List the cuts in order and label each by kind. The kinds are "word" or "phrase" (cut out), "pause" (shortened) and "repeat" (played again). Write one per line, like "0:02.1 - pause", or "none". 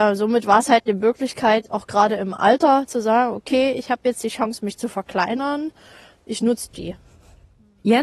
none